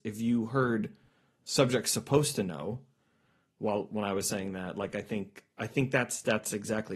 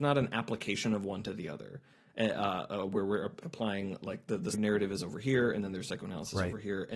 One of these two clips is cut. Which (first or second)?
second